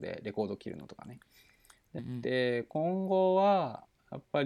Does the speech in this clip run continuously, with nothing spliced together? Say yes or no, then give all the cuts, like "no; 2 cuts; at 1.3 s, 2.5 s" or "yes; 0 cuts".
no; 1 cut; at 2.0 s